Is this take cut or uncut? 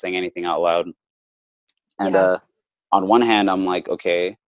uncut